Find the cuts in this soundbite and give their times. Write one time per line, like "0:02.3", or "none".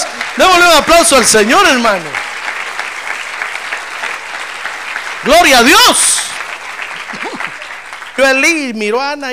0:08.2